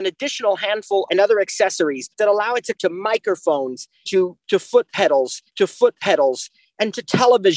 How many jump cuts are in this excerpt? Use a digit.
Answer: 5